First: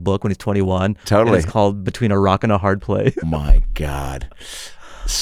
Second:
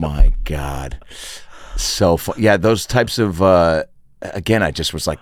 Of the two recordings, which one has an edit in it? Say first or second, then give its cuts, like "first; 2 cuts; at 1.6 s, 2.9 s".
first; 1 cut; at 3.2 s